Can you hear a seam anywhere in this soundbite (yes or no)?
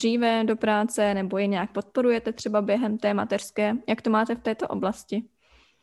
no